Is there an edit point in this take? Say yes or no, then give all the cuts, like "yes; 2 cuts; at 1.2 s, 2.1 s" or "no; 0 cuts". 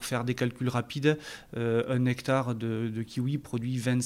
no; 0 cuts